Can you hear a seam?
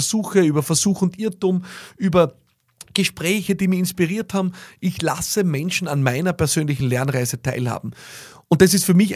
no; 0 cuts

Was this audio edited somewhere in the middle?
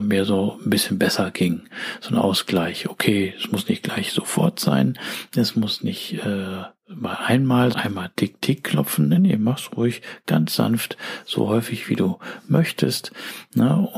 yes; 1 cut; at 7.7 s

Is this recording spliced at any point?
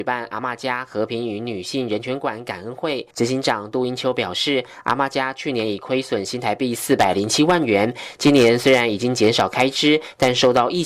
yes; 1 cut; at 3.1 s

